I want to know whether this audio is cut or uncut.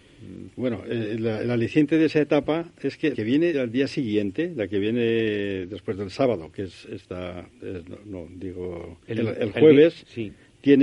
cut